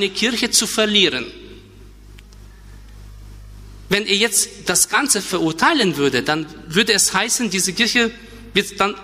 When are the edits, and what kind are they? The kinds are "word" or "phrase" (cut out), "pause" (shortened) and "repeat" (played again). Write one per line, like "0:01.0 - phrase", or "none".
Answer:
none